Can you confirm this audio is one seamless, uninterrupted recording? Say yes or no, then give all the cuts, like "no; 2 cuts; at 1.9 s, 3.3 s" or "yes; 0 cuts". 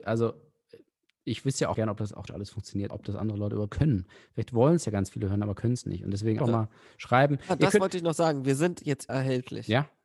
no; 6 cuts; at 1.7 s, 2.3 s, 2.9 s, 3.7 s, 6.4 s, 9.1 s